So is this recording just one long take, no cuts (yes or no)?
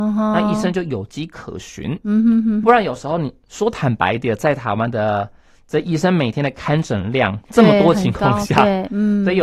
no